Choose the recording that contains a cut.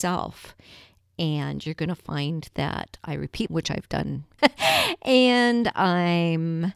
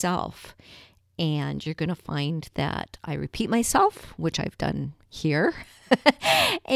first; 2 cuts; at 3.5 s, 4.4 s

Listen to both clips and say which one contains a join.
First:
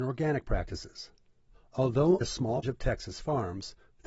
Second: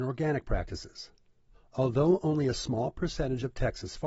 first; 2 cuts; at 2.2 s, 2.6 s

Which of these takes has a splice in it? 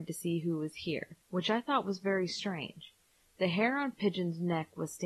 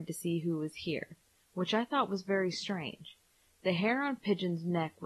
first; 1 cut; at 1.2 s

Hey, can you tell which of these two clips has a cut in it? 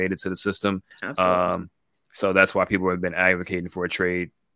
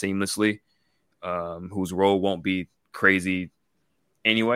first; 1 cut; at 0.9 s

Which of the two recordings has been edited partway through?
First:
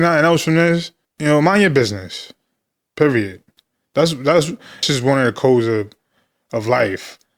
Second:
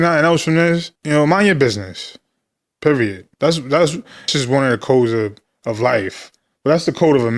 second; 3 cuts; at 1.0 s, 3.3 s, 5.5 s

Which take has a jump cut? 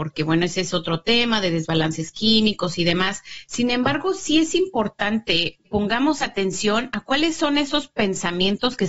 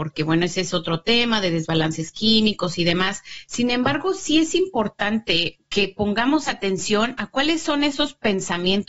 first; 1 cut; at 5.6 s

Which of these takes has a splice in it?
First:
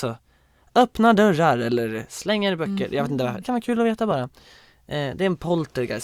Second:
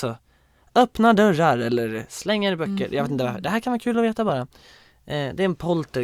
first; 1 cut; at 3.4 s

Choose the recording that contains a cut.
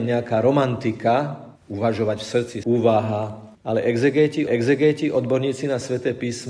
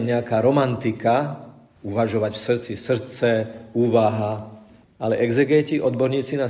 first; 4 cuts; at 1.6 s, 2.6 s, 3.5 s, 4.5 s

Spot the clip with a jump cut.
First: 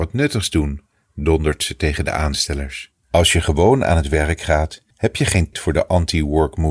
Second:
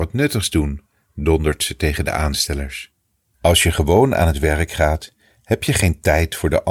first; 3 cuts; at 3.0 s, 4.9 s, 5.5 s

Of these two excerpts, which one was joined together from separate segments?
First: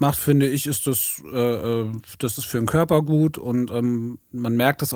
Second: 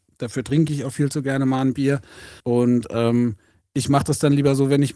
second; 1 cut; at 2.4 s

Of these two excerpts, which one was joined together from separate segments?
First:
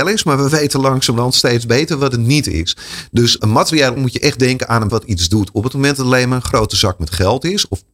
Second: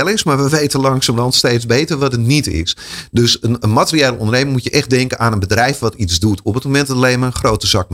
first; 3 cuts; at 3.4 s, 4.0 s, 4.9 s

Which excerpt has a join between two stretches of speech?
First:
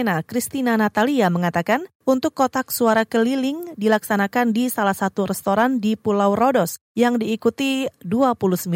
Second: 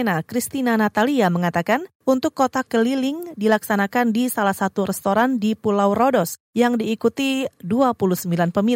second; 1 cut; at 2.7 s

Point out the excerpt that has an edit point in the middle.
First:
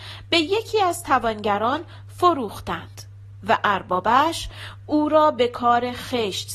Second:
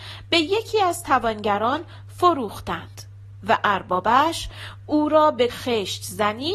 second; 1 cut; at 5.5 s

